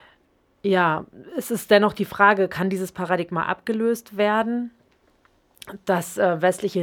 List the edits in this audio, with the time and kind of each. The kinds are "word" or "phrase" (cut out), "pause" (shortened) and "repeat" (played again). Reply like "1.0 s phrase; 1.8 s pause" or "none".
none